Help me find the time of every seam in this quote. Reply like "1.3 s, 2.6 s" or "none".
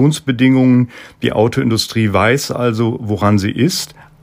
none